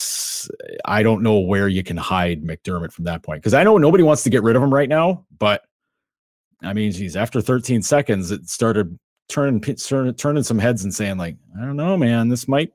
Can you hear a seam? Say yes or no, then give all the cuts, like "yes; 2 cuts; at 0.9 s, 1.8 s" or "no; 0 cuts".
no; 0 cuts